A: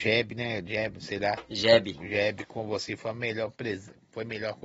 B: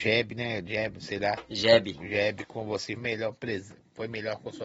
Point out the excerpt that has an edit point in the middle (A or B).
B